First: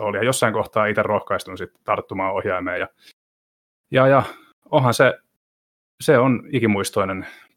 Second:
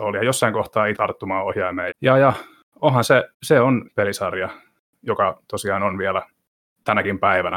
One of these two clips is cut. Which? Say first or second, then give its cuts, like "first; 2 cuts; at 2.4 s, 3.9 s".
second; 4 cuts; at 1.0 s, 1.9 s, 3.3 s, 3.9 s